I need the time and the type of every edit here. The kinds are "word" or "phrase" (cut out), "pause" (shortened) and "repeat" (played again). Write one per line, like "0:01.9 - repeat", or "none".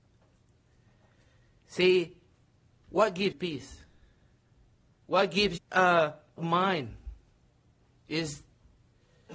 0:03.3 - word
0:05.6 - word
0:06.4 - phrase